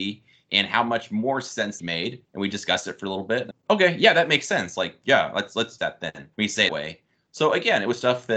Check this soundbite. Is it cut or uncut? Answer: cut